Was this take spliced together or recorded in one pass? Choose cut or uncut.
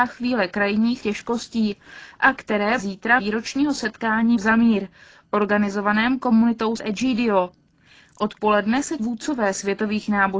cut